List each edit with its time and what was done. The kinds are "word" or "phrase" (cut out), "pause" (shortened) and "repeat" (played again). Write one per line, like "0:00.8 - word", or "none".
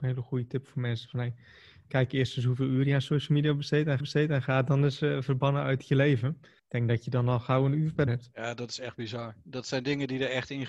0:01.9 - word
0:04.0 - repeat
0:06.6 - pause
0:08.1 - phrase